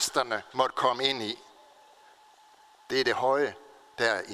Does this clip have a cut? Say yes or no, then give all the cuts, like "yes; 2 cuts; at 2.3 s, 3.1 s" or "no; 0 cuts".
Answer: no; 0 cuts